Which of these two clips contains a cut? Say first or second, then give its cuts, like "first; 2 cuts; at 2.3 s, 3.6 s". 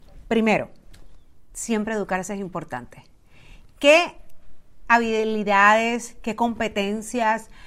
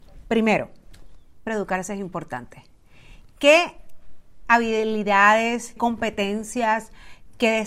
second; 2 cuts; at 1.5 s, 5.8 s